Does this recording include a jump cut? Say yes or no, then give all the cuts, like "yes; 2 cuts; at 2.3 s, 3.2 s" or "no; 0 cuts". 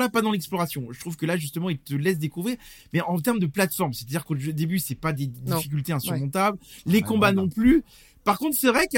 no; 0 cuts